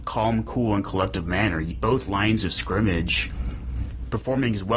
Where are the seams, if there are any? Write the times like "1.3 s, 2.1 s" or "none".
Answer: 1.7 s